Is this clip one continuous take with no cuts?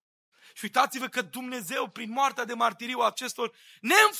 yes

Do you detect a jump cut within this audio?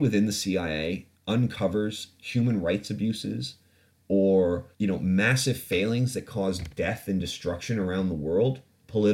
yes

